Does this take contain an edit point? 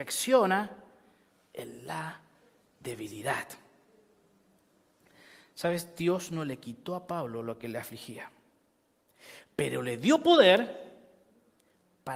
no; 0 cuts

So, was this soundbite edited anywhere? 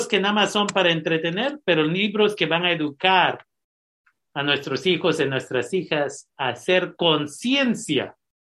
no; 0 cuts

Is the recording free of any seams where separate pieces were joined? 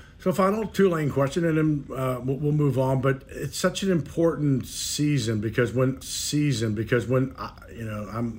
no; 1 cut; at 6.0 s

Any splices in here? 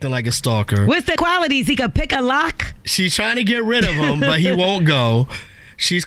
yes; 1 cut; at 1.2 s

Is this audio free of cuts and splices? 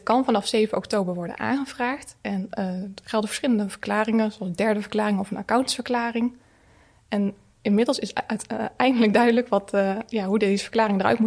yes; 0 cuts

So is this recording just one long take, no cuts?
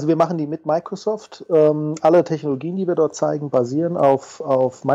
yes; 0 cuts

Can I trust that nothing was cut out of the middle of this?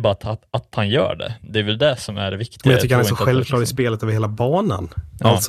yes; 0 cuts

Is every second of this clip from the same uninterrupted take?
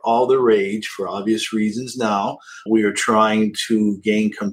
no; 1 cut; at 2.7 s

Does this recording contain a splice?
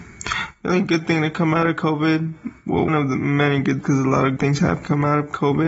yes; 3 cuts; at 2.9 s, 3.8 s, 4.4 s

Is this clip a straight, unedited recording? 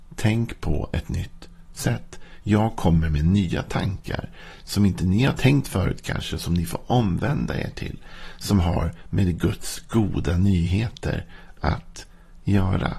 yes; 0 cuts

